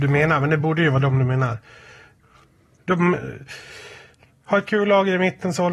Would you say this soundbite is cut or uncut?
uncut